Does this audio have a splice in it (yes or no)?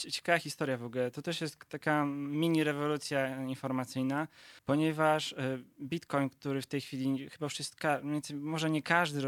yes